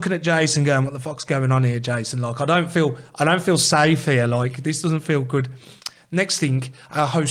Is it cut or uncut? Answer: uncut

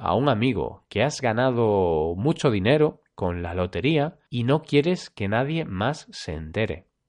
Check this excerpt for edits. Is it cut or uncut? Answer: cut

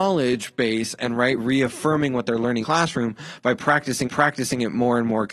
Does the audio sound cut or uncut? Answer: cut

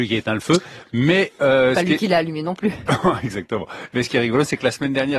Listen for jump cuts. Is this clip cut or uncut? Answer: uncut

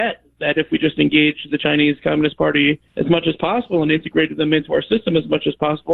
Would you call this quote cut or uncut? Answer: cut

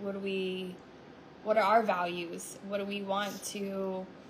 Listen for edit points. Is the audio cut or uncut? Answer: uncut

